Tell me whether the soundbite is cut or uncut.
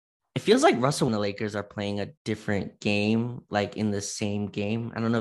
cut